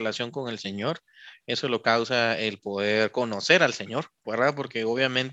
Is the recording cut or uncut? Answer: uncut